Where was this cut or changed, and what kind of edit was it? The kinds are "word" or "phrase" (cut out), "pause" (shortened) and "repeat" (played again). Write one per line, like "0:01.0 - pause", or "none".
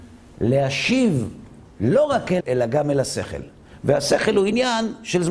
0:02.4 - word